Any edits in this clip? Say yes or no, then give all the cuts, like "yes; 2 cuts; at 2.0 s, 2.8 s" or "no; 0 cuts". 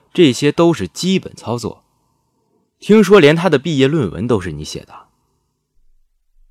no; 0 cuts